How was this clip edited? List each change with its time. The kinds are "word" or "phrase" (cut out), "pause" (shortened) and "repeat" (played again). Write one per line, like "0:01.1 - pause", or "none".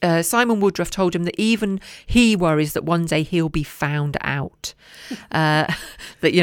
none